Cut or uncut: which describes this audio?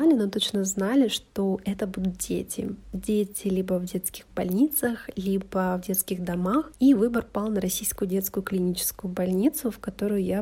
uncut